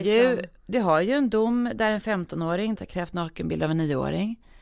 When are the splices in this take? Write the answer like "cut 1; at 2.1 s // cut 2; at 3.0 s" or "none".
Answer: cut 1; at 2.8 s